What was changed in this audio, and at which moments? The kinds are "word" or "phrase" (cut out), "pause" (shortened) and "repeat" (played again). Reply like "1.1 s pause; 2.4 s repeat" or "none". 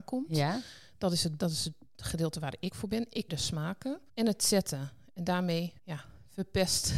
1.4 s word; 2.7 s word; 3.3 s word; 4.1 s pause; 5.8 s pause